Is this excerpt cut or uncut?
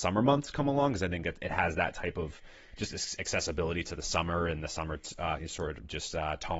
uncut